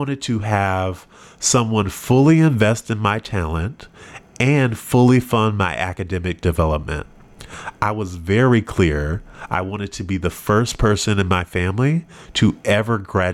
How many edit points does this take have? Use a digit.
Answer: 0